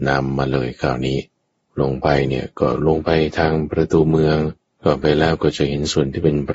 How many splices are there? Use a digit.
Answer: 2